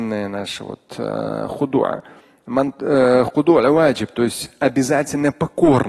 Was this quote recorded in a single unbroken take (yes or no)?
yes